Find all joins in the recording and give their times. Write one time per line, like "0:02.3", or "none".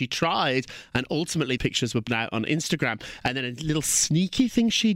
0:01.6
0:02.1